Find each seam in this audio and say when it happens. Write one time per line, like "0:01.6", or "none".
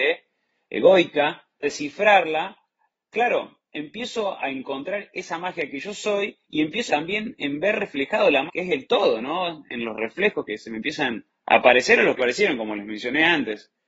0:01.6
0:06.4
0:06.9
0:08.5
0:10.5
0:11.3
0:12.2